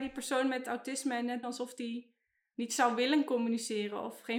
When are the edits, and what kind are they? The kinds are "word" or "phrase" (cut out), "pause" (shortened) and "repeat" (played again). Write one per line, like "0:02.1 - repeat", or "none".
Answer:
0:01.4 - word

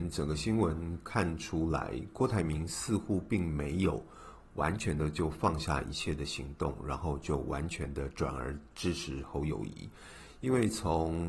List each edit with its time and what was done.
0:08.7 - pause

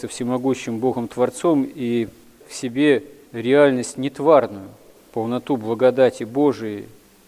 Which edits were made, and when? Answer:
0:02.4 - word

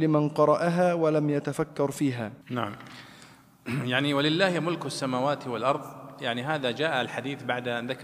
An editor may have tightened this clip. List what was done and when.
0:02.4 - pause

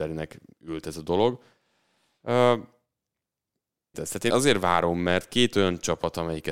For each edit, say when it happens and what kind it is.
0:03.9 - phrase
0:04.3 - word

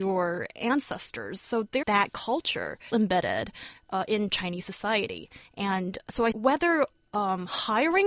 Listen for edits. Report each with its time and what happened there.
0:01.8 - phrase
0:02.9 - word
0:04.3 - word
0:06.3 - phrase

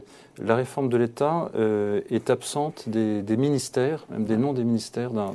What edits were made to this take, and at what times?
none

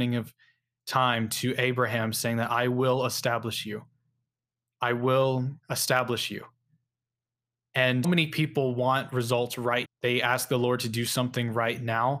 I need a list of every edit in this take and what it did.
0:05.6 - pause
0:08.0 - word
0:09.9 - word

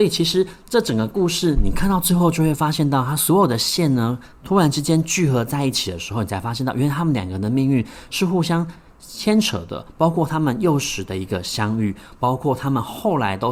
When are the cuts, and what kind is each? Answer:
none

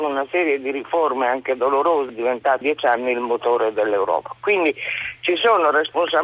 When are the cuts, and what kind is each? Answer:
0:02.1 - word
0:02.6 - word

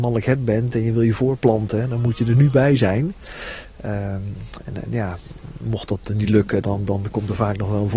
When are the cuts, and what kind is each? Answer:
none

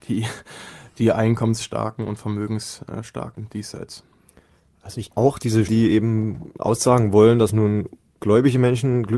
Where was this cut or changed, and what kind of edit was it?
0:03.3 - word
0:05.1 - word
0:05.7 - word

